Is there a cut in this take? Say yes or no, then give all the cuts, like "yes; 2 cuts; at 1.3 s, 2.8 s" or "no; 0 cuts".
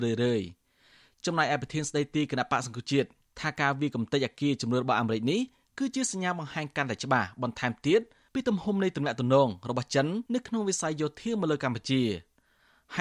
yes; 1 cut; at 10.3 s